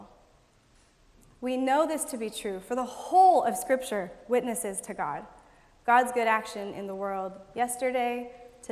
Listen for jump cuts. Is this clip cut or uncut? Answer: uncut